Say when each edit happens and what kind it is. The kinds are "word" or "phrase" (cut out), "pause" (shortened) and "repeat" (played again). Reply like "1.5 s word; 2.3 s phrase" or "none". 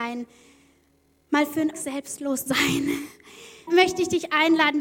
1.7 s word; 2.5 s word; 3.7 s word